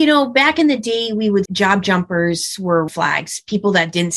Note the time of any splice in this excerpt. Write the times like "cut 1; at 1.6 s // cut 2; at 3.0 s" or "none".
cut 1; at 1.5 s // cut 2; at 2.9 s